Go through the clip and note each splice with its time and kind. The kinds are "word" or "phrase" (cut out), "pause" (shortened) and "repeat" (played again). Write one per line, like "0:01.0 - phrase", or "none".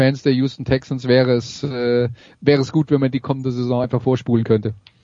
none